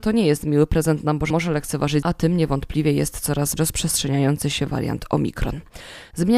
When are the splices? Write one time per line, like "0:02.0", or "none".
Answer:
0:01.3
0:02.0
0:03.6

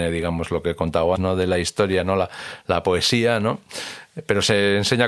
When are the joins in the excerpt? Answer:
0:01.2

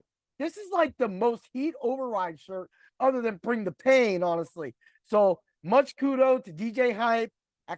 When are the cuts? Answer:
none

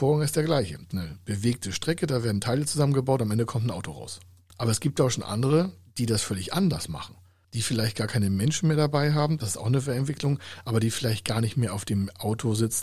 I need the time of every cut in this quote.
0:00.9

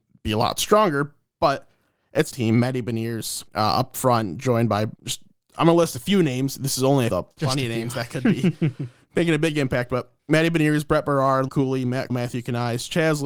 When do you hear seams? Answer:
0:02.3
0:03.5
0:04.9
0:07.1
0:10.2
0:11.5
0:12.1

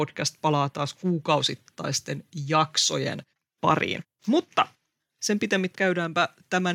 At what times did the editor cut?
0:03.3
0:05.0
0:05.7

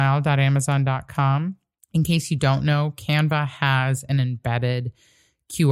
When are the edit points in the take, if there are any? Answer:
0:01.8

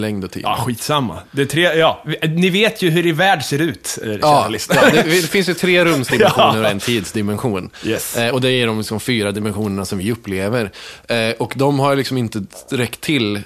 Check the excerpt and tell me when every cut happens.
none

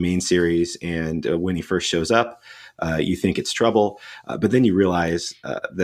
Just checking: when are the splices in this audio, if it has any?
none

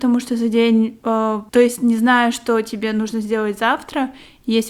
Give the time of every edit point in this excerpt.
0:01.5

